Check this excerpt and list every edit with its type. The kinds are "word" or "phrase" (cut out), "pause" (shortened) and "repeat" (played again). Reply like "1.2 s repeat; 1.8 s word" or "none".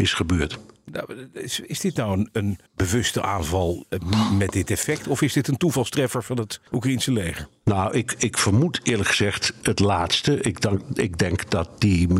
2.7 s pause; 6.7 s pause; 9.6 s word